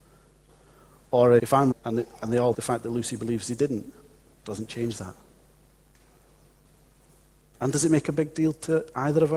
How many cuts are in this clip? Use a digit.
3